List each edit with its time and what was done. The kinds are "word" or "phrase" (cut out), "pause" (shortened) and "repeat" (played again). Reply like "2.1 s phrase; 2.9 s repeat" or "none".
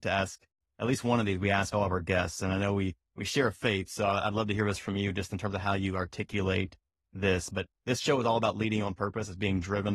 none